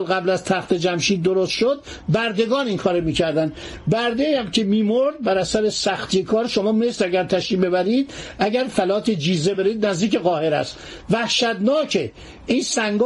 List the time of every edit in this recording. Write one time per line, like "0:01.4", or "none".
none

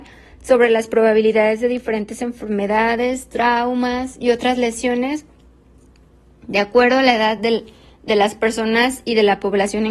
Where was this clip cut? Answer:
none

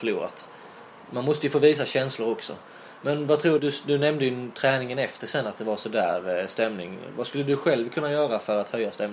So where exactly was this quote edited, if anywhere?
0:03.6

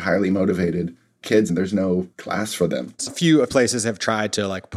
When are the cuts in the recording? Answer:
0:01.5
0:02.1
0:03.1
0:03.5

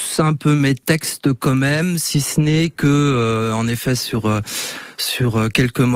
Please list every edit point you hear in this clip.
none

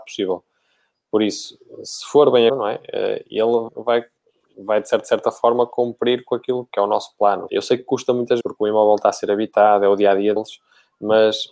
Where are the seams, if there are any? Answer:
0:02.5
0:03.7
0:05.0
0:06.7
0:07.5
0:08.4
0:10.4

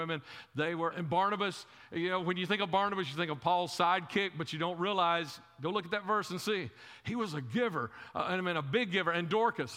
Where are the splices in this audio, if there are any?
0:00.9

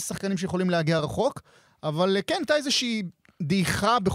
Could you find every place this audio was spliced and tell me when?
none

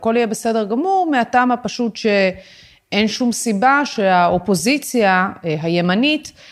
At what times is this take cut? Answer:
none

